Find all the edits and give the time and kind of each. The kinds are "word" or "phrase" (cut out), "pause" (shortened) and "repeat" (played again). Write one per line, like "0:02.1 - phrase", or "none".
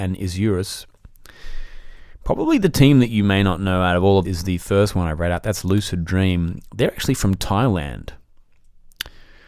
0:04.2 - word